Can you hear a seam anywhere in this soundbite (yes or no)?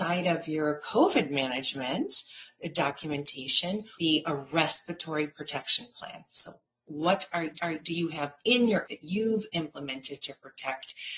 yes